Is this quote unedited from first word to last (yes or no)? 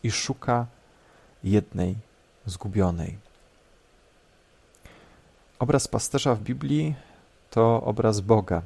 yes